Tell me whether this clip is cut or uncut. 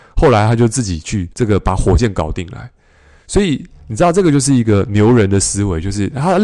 cut